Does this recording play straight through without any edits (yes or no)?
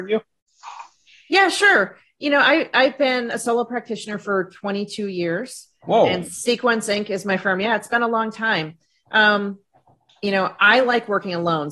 yes